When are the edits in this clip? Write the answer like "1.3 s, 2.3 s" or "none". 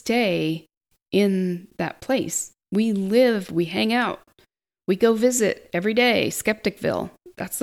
2.6 s